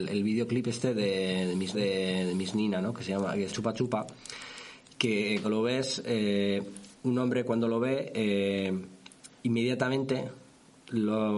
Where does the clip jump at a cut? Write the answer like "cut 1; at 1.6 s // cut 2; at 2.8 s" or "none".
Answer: cut 1; at 1.7 s // cut 2; at 3.5 s // cut 3; at 5.4 s // cut 4; at 6.9 s // cut 5; at 9.4 s